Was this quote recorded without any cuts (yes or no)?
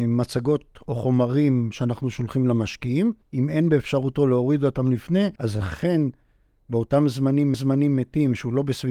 no